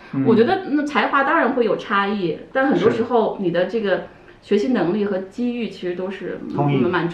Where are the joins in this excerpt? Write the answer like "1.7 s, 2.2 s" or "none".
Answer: none